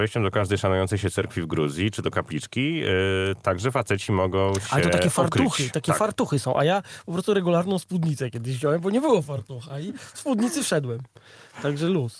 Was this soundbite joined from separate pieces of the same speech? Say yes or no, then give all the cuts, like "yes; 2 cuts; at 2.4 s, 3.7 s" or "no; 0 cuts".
no; 0 cuts